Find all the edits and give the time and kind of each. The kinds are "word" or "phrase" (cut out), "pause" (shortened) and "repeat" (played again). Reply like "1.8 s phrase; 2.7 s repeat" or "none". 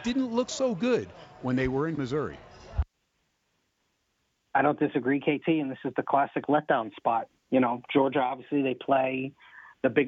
2.0 s word; 7.4 s pause

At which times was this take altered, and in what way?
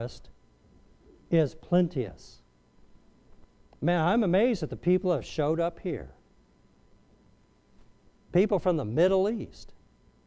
none

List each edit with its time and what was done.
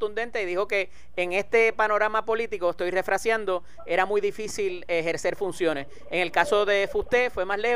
none

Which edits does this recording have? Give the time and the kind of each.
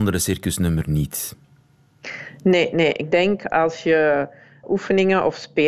4.6 s word

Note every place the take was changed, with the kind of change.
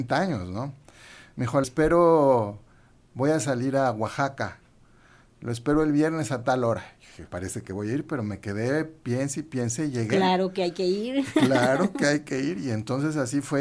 1.6 s word; 7.3 s word

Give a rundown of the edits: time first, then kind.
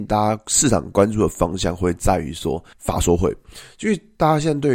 2.7 s pause

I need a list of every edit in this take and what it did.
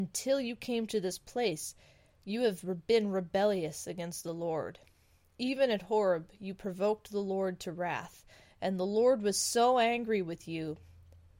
none

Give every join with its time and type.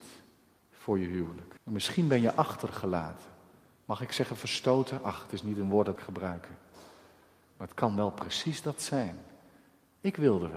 1.6 s pause; 6.0 s phrase

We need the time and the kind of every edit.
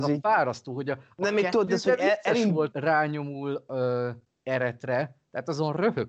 2.7 s word

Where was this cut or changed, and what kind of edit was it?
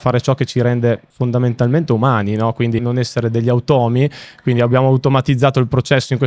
1.1 s pause; 2.8 s word

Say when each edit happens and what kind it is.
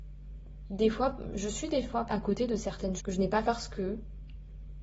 2.1 s word; 3.0 s word; 3.4 s word

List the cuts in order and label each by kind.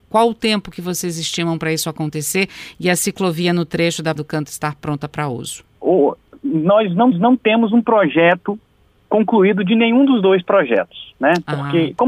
4.2 s word; 5.7 s pause; 7.1 s repeat

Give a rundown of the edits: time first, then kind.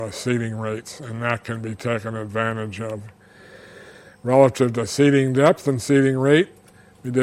none

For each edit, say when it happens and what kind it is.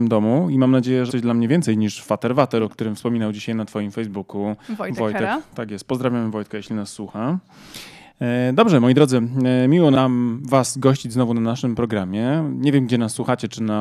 1.1 s word; 4.6 s pause

